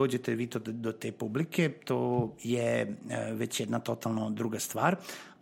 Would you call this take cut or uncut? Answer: uncut